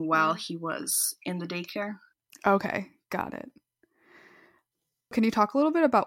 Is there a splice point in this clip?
no; 0 cuts

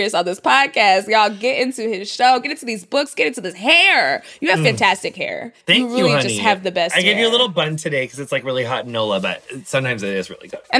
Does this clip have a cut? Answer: yes; 1 cut; at 5.6 s

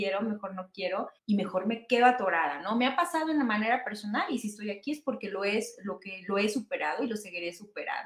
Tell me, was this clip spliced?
yes; 1 cut; at 1.2 s

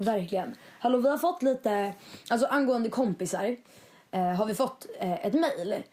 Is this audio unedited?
yes; 0 cuts

